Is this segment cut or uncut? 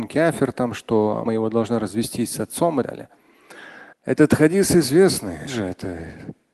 cut